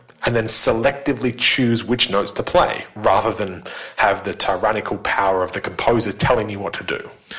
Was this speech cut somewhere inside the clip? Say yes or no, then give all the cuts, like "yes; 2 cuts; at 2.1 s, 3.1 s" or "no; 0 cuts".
no; 0 cuts